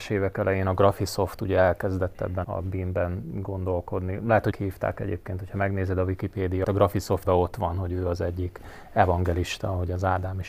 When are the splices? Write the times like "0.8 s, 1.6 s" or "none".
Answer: 2.4 s, 4.5 s, 6.6 s, 7.2 s